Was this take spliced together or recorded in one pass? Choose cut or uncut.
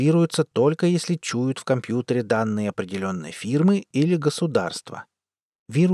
uncut